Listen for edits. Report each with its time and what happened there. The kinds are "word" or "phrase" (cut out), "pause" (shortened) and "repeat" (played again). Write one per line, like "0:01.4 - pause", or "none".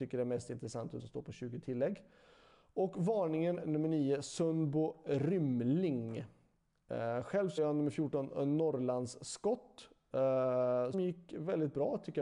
0:01.0 - word
0:03.6 - word
0:07.6 - word
0:10.9 - word